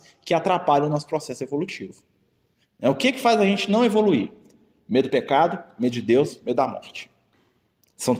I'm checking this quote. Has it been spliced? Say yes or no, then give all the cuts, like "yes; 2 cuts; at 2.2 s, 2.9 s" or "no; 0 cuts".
no; 0 cuts